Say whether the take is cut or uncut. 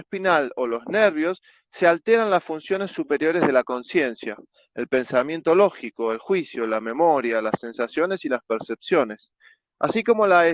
uncut